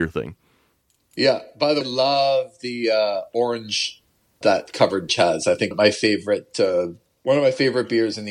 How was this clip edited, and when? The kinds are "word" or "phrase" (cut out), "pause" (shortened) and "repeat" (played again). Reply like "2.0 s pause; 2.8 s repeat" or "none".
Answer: 1.8 s word; 4.4 s word; 5.1 s word; 5.7 s word